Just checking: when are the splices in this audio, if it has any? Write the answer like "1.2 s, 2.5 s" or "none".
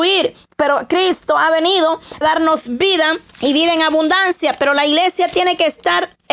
2.2 s, 3.3 s